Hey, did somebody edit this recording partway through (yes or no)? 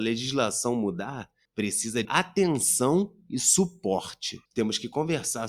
yes